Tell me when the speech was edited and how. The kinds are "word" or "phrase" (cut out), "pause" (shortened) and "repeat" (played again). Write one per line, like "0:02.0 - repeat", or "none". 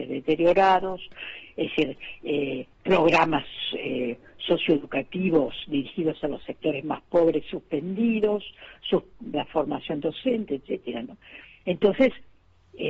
0:02.7 - pause
0:09.3 - word